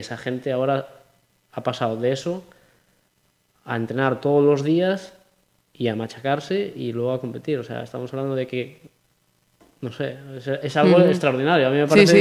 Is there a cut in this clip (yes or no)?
no